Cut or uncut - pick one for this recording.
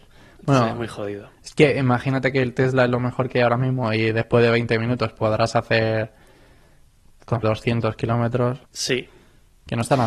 cut